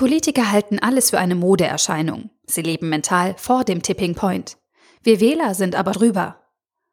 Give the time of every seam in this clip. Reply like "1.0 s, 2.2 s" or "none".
5.9 s